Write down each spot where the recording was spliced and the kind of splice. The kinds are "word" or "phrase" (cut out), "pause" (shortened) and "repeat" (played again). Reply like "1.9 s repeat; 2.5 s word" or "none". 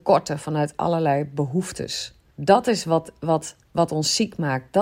2.3 s pause